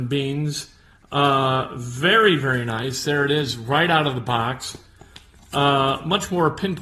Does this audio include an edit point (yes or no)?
no